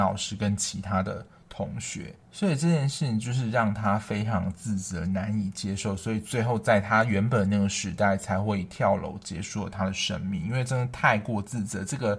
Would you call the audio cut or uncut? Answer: cut